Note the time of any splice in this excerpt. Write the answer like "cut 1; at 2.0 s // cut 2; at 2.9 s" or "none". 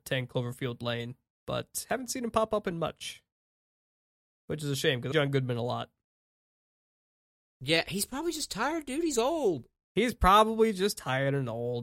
cut 1; at 5.1 s